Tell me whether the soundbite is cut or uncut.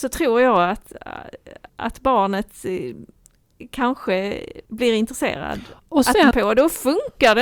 cut